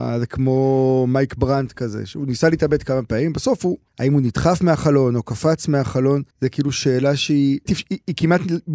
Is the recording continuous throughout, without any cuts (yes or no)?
no